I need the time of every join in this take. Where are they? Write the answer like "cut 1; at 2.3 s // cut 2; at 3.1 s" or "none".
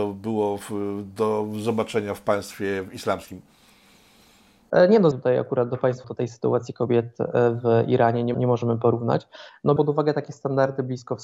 cut 1; at 5.1 s // cut 2; at 6.0 s // cut 3; at 8.3 s // cut 4; at 9.8 s